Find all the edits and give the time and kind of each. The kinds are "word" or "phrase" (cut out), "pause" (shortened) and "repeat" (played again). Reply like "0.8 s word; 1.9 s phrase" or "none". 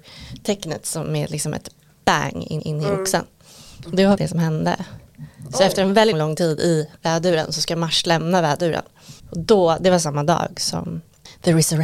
2.6 s repeat; 4.2 s word; 6.1 s word; 7.0 s pause; 9.2 s pause